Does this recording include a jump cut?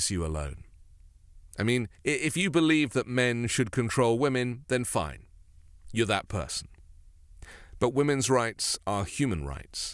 yes; 2 cuts; at 1.5 s, 1.9 s

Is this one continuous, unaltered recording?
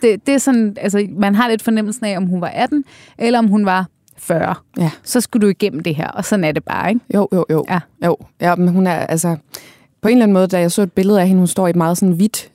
yes; 0 cuts

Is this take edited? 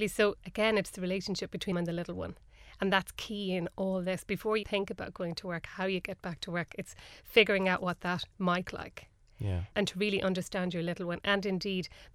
yes; 4 cuts; at 1.7 s, 4.6 s, 8.7 s, 9.7 s

